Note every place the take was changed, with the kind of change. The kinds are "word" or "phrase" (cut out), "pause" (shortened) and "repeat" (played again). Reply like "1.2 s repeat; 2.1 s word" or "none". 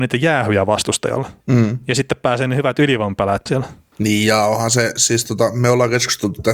1.4 s pause; 3.5 s word